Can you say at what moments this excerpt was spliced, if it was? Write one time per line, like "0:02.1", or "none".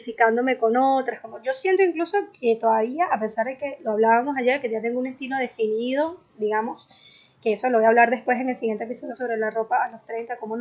none